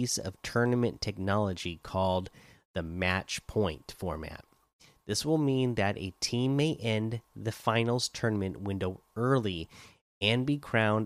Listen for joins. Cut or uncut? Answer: uncut